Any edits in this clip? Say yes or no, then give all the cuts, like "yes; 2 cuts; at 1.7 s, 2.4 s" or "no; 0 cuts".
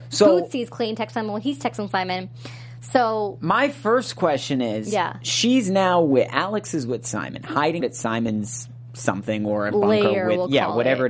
yes; 1 cut; at 7.8 s